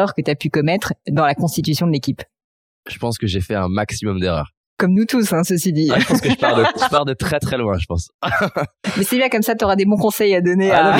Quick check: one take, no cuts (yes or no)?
yes